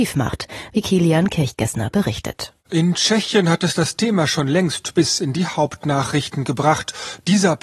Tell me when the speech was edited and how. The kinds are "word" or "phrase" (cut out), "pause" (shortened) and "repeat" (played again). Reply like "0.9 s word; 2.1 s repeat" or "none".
2.6 s pause